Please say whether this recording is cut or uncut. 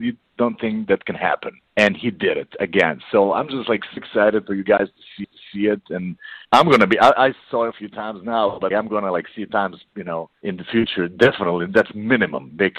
cut